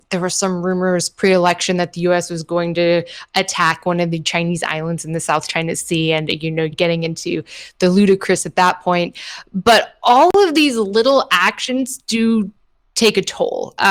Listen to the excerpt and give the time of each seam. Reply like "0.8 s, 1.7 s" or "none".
6.7 s

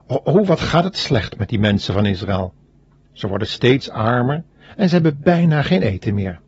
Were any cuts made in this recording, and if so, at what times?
none

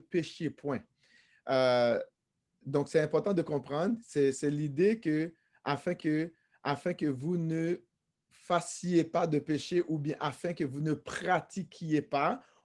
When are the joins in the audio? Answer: 6.0 s

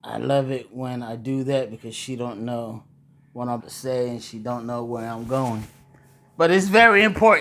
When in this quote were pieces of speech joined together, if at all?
3.6 s

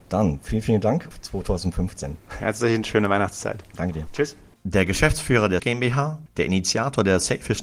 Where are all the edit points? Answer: 1.1 s, 2.8 s, 4.5 s, 5.6 s

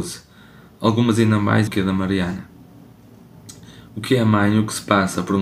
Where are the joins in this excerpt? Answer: 1.7 s

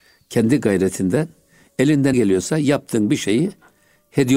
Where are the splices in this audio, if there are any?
2.1 s

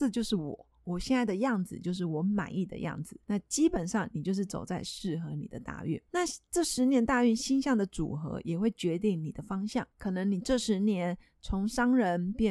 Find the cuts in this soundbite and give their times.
3.2 s, 6.1 s, 9.9 s

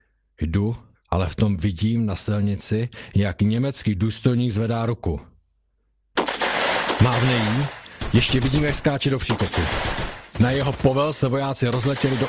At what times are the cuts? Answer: 0.9 s, 10.3 s

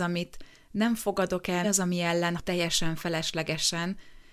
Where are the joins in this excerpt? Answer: 1.6 s, 2.4 s

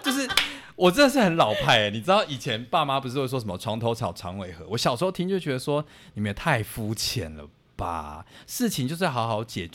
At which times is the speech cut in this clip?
none

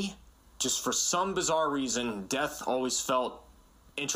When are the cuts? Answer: none

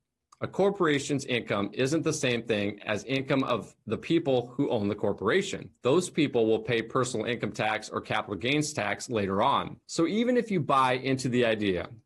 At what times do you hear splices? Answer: 5.8 s, 9.8 s

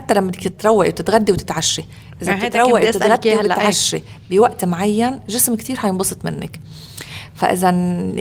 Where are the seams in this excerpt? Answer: none

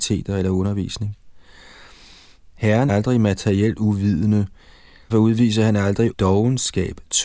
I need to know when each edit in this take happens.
2.9 s, 5.1 s, 6.1 s

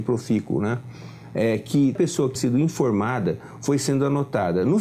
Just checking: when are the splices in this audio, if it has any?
2.0 s, 2.4 s

